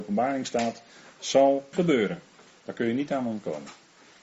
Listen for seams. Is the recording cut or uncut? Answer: cut